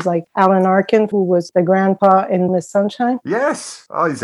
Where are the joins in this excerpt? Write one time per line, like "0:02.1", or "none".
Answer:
0:01.1
0:02.5